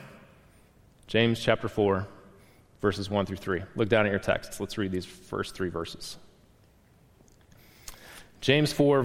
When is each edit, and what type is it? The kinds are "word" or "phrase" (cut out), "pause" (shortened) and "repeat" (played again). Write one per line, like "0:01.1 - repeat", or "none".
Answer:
none